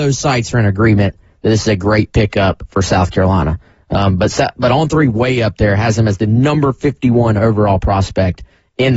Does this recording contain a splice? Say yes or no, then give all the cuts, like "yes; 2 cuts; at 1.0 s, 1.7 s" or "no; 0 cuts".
no; 0 cuts